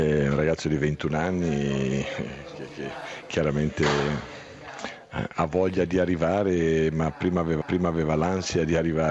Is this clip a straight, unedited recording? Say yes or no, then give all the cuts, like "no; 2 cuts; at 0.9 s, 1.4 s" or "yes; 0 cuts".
no; 1 cut; at 7.6 s